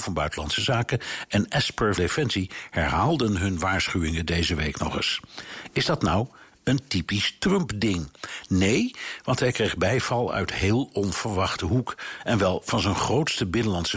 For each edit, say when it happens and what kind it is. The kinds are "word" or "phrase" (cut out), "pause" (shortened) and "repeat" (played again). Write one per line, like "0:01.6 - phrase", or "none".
0:02.0 - word